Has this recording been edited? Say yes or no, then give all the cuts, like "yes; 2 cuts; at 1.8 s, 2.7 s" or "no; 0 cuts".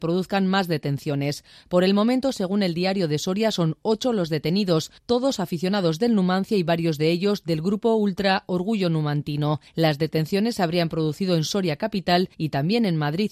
yes; 3 cuts; at 5.0 s, 9.7 s, 12.3 s